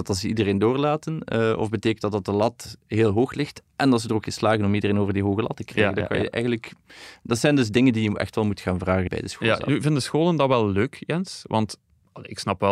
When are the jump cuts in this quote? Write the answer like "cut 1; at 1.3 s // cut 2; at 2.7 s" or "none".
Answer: cut 1; at 9.1 s